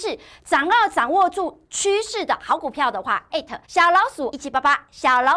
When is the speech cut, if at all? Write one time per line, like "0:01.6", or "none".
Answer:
0:03.3
0:03.6
0:04.3